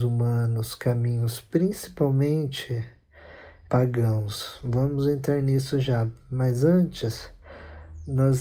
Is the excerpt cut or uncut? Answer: cut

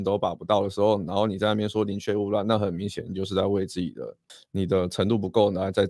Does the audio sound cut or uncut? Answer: uncut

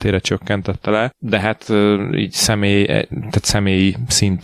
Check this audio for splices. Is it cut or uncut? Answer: uncut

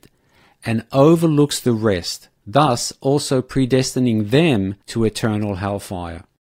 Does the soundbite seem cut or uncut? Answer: cut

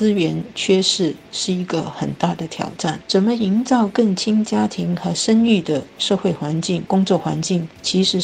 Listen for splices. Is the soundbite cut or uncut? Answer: uncut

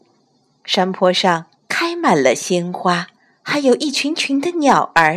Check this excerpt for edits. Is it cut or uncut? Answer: cut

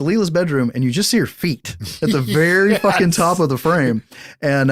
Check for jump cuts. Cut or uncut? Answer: uncut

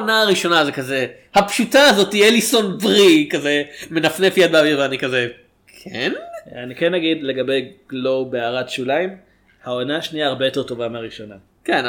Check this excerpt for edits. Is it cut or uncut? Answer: uncut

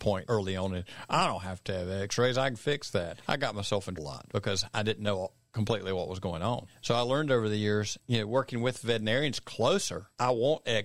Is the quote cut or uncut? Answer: cut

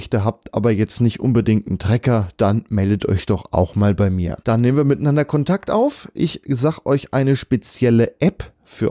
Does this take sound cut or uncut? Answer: cut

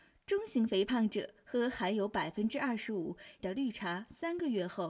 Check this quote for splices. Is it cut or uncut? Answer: cut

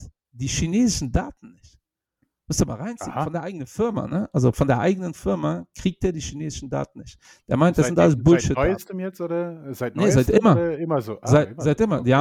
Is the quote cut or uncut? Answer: uncut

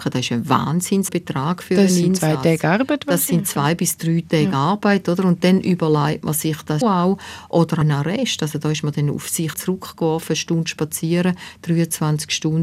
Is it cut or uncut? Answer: cut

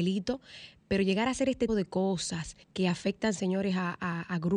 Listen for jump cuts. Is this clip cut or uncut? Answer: cut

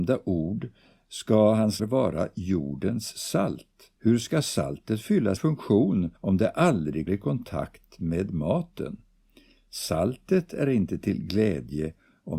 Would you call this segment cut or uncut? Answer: cut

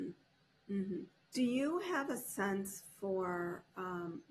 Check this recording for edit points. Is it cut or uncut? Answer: cut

